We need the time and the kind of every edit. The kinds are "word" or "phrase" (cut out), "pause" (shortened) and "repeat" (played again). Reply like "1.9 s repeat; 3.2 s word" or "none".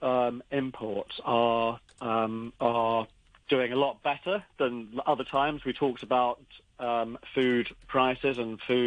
none